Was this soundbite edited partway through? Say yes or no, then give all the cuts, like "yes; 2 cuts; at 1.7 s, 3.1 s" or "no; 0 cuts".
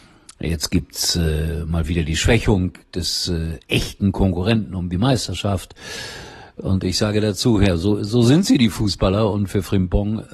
no; 0 cuts